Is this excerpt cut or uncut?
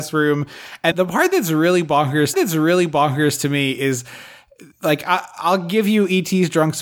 cut